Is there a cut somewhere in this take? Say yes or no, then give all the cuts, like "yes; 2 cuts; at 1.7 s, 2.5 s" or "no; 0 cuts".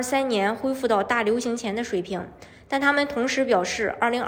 no; 0 cuts